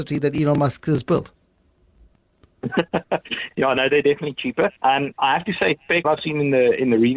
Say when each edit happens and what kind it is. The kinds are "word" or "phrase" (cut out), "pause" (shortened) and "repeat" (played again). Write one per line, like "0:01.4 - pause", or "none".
0:03.5 - word
0:04.8 - pause
0:06.0 - phrase